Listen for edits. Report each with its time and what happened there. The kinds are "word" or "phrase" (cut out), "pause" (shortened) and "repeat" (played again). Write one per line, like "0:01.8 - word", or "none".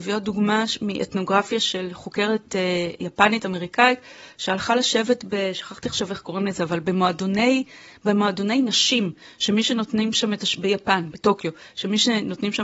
none